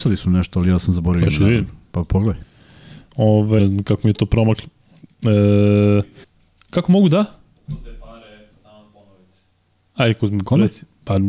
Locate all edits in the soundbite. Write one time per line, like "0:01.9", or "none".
0:03.6
0:06.2